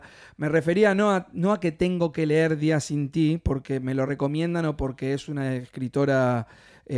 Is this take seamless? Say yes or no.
yes